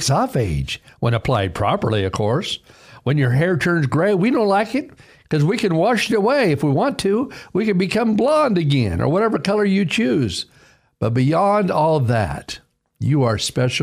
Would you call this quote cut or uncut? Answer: uncut